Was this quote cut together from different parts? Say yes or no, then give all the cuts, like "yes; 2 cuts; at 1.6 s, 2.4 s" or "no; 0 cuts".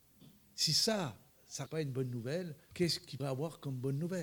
yes; 3 cuts; at 1.7 s, 2.7 s, 3.2 s